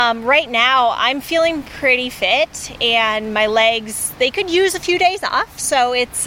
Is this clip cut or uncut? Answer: uncut